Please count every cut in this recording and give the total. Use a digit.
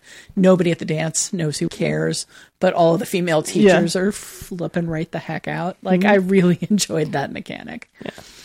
1